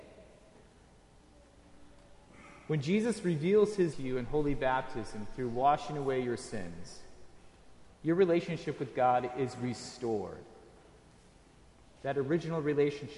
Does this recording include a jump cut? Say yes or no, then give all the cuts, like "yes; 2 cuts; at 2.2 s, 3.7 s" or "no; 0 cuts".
yes; 1 cut; at 3.9 s